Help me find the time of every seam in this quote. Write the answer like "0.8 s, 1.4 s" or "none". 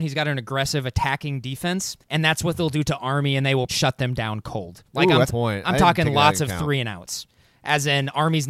2.0 s, 3.7 s, 4.9 s, 5.3 s